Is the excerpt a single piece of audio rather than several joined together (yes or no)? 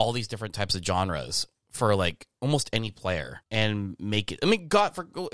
no